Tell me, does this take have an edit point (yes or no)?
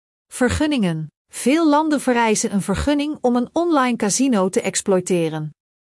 yes